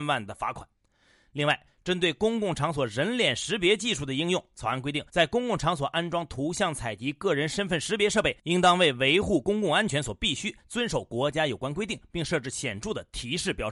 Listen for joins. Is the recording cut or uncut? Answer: cut